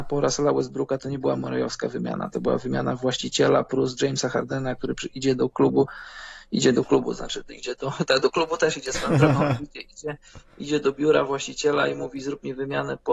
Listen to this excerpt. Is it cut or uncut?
uncut